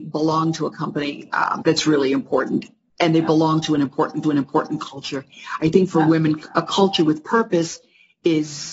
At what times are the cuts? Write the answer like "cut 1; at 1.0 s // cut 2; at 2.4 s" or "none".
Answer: cut 1; at 1.6 s // cut 2; at 4.2 s